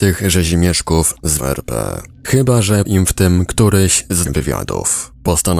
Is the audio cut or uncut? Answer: cut